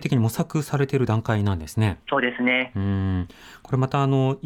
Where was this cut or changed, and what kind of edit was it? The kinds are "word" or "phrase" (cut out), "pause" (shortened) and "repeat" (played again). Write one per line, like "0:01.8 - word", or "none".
0:02.0 - pause